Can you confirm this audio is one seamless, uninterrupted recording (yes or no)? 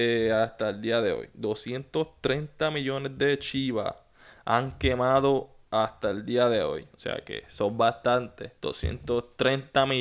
no